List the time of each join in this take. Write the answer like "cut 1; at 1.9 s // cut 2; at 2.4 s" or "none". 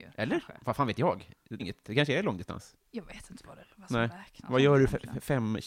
cut 1; at 1.6 s // cut 2; at 2.8 s